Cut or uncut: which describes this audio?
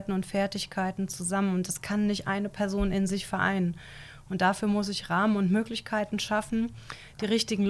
uncut